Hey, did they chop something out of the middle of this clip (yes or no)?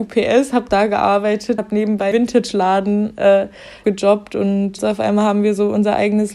yes